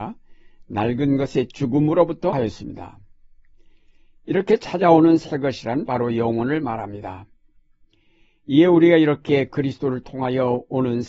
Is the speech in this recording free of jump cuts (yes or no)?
no